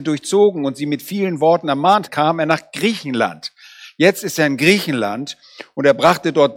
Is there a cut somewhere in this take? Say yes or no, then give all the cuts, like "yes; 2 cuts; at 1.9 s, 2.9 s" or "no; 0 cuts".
yes; 1 cut; at 2.1 s